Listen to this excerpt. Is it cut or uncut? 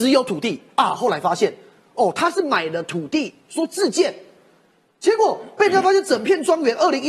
uncut